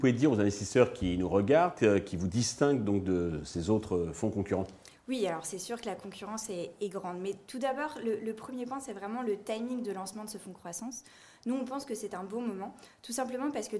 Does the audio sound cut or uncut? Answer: uncut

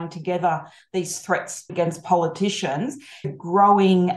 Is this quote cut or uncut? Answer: cut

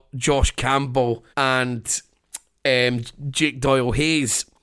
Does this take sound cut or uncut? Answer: cut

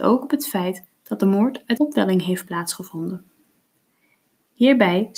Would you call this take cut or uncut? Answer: cut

